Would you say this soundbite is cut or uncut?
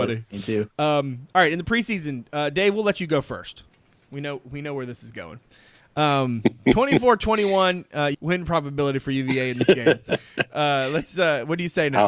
cut